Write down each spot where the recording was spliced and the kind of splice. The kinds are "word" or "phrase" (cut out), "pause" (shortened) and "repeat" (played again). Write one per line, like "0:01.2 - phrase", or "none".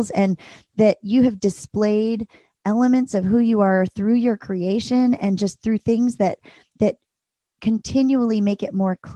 none